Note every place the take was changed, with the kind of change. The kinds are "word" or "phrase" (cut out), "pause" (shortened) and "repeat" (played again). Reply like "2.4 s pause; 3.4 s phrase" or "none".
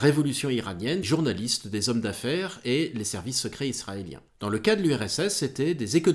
1.0 s phrase; 4.3 s pause

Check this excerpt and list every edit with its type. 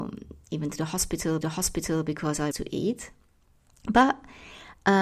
1.4 s repeat; 2.5 s word

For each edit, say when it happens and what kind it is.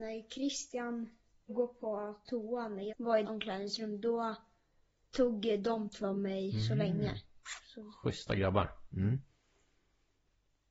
1.5 s word; 2.9 s word; 3.2 s word; 6.0 s word

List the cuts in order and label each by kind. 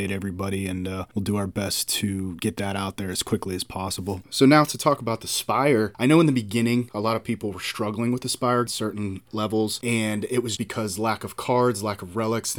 8.7 s phrase; 10.6 s word

